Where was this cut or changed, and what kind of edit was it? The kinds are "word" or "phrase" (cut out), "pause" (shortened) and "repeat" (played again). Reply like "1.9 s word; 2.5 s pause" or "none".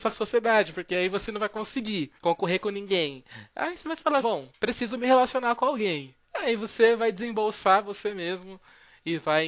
2.2 s pause; 4.2 s word; 4.5 s pause; 6.2 s pause